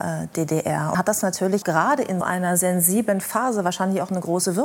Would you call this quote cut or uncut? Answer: cut